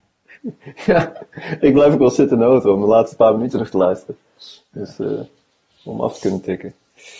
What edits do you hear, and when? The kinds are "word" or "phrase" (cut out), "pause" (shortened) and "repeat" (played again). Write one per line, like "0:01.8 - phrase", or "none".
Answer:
none

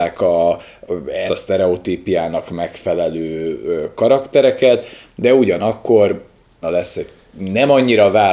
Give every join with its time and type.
0:01.3 - word
0:06.6 - phrase

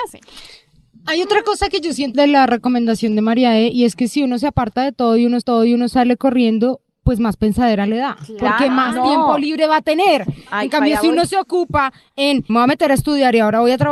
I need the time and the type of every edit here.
0:02.1 - word
0:05.4 - repeat
0:12.5 - word

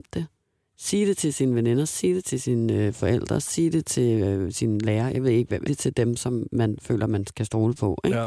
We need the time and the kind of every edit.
0:05.7 - word

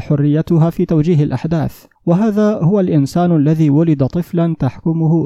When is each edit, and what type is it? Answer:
0:01.9 - pause

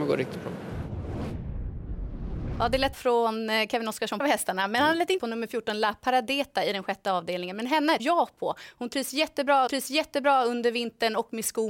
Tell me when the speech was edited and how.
0:02.9 - word
0:04.2 - phrase
0:05.2 - word
0:08.0 - word
0:09.7 - repeat

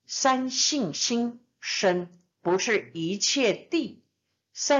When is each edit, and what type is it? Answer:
0:02.3 - pause

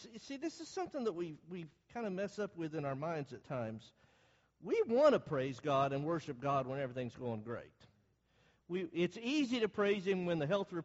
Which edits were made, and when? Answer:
0:03.4 - word

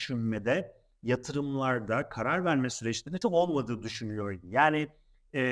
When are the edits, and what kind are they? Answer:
0:03.2 - phrase

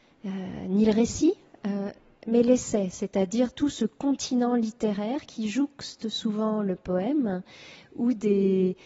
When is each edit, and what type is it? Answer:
none

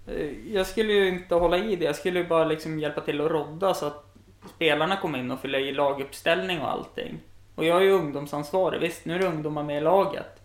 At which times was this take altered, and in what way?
0:07.5 - pause

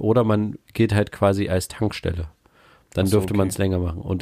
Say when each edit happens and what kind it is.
none

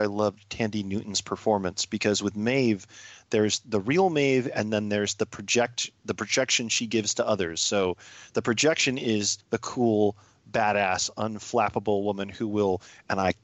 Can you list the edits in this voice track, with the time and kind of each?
0:09.4 - pause

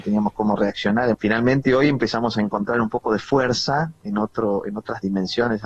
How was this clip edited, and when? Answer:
0:01.1 - phrase

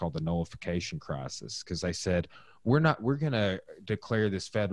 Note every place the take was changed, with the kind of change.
none

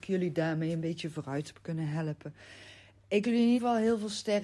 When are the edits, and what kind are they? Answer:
0:03.2 - word
0:03.6 - word

